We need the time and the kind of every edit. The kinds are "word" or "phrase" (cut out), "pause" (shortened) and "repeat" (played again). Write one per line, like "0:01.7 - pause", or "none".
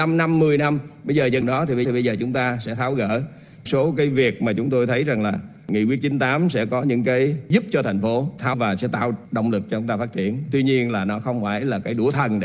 0:01.4 - word
0:01.8 - repeat
0:03.7 - phrase
0:08.5 - word